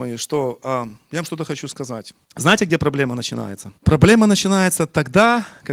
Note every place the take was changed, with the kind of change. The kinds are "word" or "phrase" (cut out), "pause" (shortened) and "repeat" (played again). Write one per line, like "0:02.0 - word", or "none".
0:02.2 - pause
0:03.8 - pause